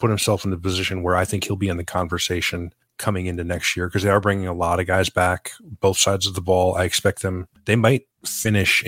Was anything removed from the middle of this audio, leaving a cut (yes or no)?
no